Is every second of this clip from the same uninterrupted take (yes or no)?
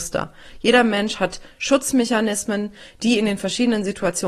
yes